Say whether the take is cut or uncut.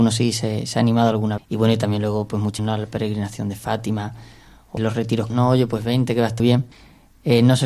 cut